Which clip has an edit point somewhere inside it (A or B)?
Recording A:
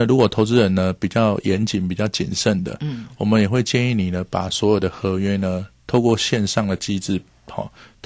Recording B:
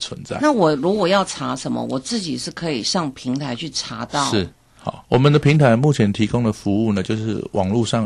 B